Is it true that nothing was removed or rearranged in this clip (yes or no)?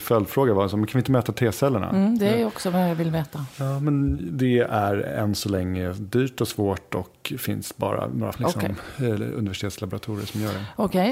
no